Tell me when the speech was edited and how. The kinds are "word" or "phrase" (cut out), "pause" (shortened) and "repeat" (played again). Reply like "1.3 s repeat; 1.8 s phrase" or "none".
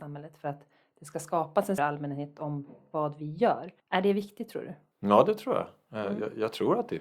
1.8 s word; 3.8 s pause; 4.9 s pause